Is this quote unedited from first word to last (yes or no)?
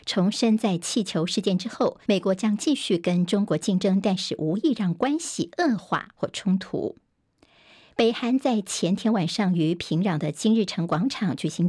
no